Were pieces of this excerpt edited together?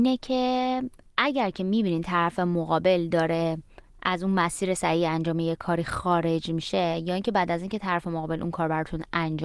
no; 0 cuts

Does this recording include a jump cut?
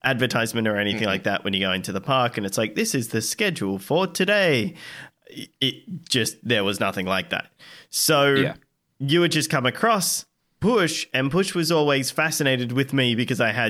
no; 0 cuts

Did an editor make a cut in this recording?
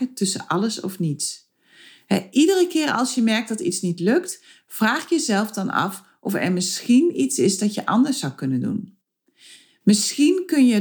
no; 0 cuts

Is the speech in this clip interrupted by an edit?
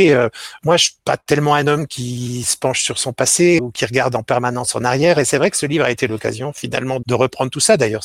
yes; 3 cuts; at 1.0 s, 3.6 s, 7.0 s

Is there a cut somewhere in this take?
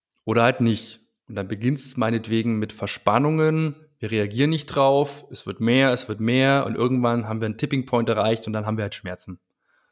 no; 0 cuts

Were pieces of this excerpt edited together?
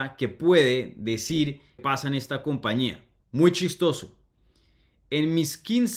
yes; 2 cuts; at 1.8 s, 3.2 s

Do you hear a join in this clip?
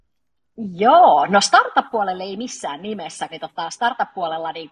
yes; 1 cut; at 3.3 s

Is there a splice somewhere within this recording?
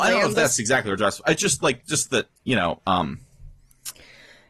yes; 1 cut; at 2.4 s

